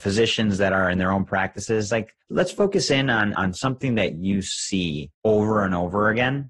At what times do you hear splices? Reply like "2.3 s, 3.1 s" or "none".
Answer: 2.2 s, 5.1 s